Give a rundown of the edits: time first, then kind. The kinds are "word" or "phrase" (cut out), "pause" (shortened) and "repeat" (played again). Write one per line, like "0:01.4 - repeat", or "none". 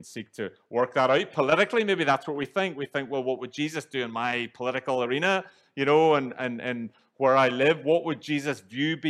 none